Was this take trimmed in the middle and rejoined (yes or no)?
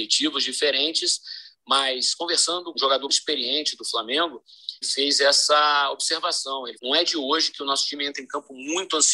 yes